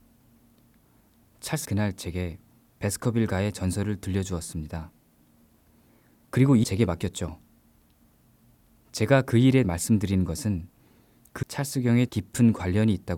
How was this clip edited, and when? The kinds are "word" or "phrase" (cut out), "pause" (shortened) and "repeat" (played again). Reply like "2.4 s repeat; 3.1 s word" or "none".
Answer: 1.6 s word; 6.6 s word; 9.6 s word; 11.4 s word; 12.1 s word